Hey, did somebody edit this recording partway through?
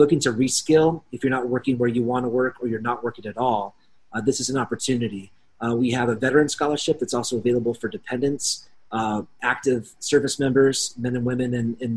no; 0 cuts

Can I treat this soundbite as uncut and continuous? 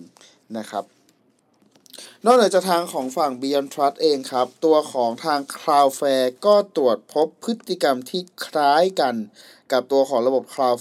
yes; 0 cuts

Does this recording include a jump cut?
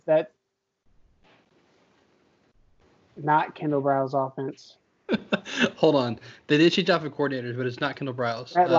no; 0 cuts

